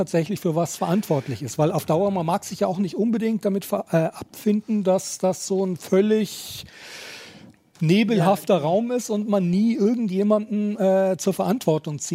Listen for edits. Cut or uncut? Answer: uncut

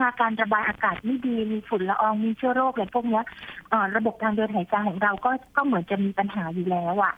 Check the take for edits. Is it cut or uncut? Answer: cut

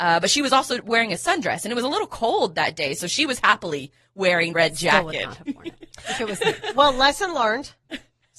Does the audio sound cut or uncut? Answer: cut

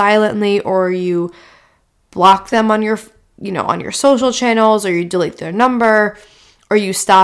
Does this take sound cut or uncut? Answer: uncut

